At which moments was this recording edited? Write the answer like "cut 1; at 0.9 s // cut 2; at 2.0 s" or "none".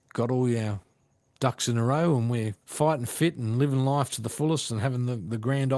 cut 1; at 2.6 s